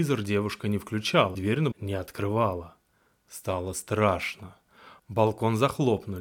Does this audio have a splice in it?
yes; 2 cuts; at 1.3 s, 1.7 s

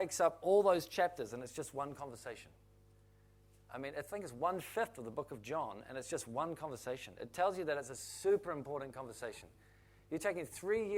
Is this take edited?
no; 0 cuts

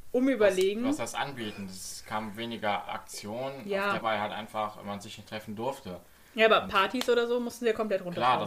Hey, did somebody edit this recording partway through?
yes; 2 cuts; at 2.9 s, 4.0 s

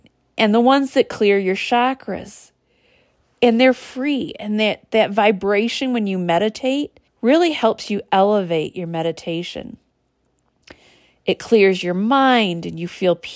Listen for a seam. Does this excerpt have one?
yes; 1 cut; at 7.1 s

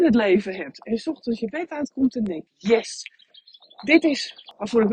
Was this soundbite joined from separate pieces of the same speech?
no; 0 cuts

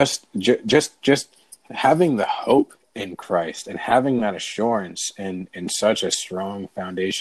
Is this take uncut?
yes; 0 cuts

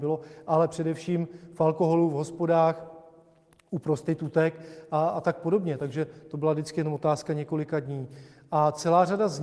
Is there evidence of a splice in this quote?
no; 0 cuts

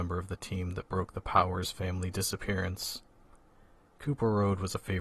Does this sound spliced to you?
no; 0 cuts

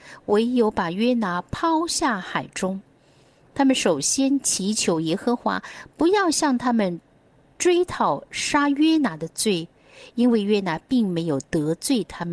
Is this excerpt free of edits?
yes; 0 cuts

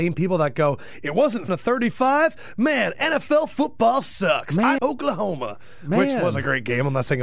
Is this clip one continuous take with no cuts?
no; 2 cuts; at 1.5 s, 4.8 s

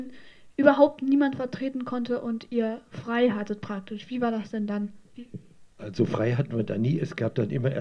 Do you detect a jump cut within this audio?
yes; 1 cut; at 5.7 s

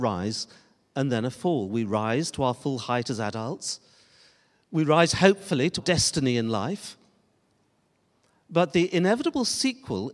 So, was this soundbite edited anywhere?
yes; 1 cut; at 5.8 s

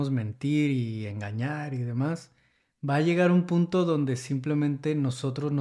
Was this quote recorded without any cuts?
yes; 0 cuts

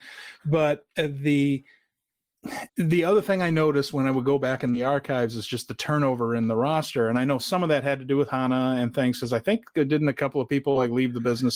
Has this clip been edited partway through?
yes; 1 cut; at 2.7 s

